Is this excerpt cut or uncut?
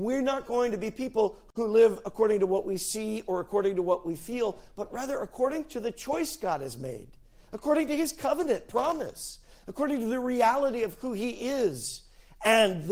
uncut